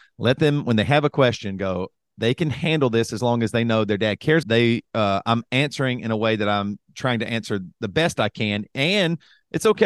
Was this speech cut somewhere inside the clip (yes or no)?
yes